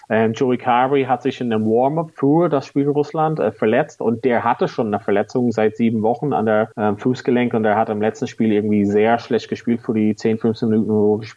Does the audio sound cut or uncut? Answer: cut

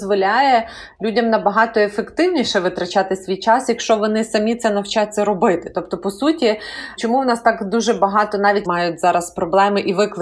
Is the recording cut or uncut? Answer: cut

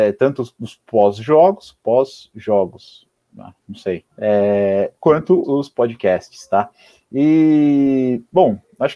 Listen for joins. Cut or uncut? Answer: cut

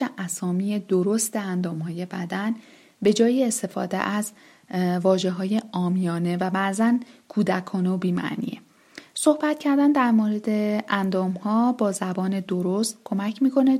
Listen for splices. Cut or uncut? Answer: uncut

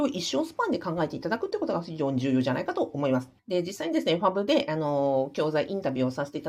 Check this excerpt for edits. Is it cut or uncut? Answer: cut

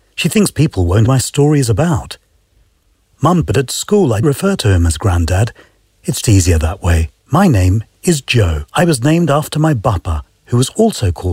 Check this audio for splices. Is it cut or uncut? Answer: cut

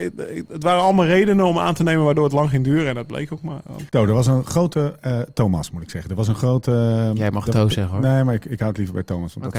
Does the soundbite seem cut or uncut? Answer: cut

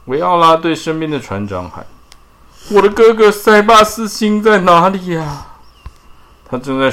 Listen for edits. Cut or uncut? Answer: uncut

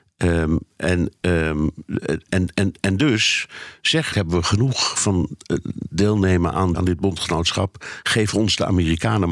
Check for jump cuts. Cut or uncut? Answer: cut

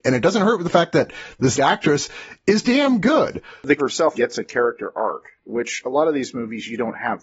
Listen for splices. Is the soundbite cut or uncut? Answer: cut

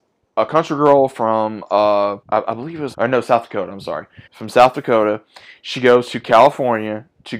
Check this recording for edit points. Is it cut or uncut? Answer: cut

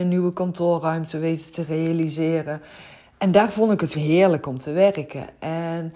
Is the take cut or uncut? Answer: cut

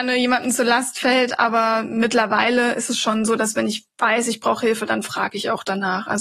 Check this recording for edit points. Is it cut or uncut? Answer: uncut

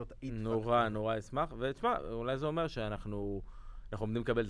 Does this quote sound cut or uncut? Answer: uncut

